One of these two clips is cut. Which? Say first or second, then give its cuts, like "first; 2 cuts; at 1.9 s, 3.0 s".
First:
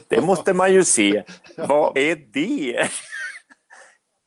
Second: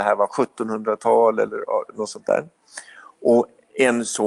first; 1 cut; at 2.0 s